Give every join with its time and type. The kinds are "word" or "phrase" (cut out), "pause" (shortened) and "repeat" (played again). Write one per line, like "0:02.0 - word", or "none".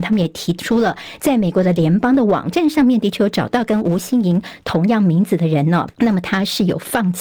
0:05.9 - pause